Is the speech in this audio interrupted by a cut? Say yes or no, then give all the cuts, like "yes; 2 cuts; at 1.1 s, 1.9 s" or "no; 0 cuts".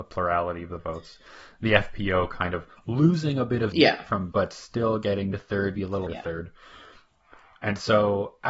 yes; 5 cuts; at 3.7 s, 4.3 s, 5.3 s, 5.8 s, 6.1 s